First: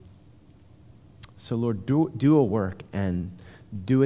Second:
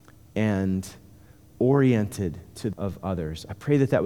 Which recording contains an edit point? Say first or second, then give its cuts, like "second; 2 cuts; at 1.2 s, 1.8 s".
second; 1 cut; at 2.7 s